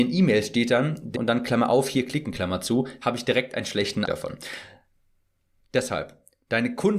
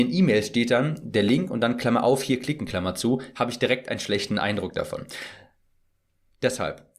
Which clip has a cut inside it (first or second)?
first